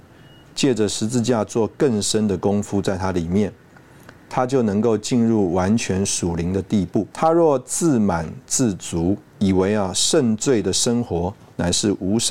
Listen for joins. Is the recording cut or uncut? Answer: cut